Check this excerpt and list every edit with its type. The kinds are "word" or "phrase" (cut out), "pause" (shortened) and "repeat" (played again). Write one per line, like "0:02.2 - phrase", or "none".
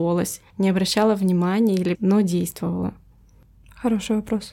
0:01.9 - phrase